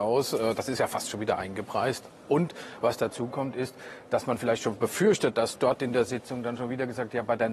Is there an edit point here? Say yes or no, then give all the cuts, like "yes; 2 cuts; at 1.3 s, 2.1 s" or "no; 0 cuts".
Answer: no; 0 cuts